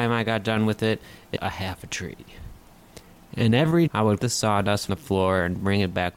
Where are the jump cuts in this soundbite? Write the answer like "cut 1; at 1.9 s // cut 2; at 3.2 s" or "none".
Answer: cut 1; at 1.4 s // cut 2; at 3.9 s // cut 3; at 4.2 s // cut 4; at 4.9 s